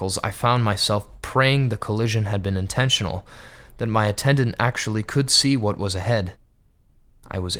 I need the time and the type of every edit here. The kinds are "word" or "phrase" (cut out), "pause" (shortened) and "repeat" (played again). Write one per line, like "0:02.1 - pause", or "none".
none